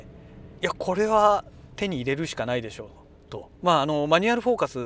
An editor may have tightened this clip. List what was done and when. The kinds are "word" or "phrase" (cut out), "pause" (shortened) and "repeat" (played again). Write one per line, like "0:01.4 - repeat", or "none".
0:03.5 - pause